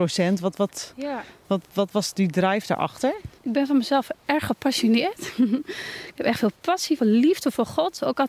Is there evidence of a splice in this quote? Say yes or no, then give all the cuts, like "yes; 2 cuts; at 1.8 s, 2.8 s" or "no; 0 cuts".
yes; 2 cuts; at 3.4 s, 7.0 s